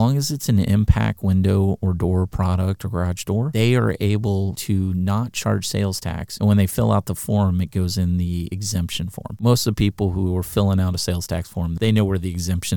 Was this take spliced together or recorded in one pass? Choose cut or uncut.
uncut